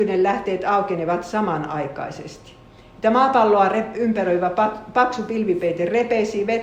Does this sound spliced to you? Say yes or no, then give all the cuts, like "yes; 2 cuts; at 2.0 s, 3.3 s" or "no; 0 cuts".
no; 0 cuts